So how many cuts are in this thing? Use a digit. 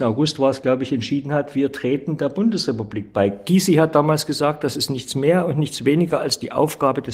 0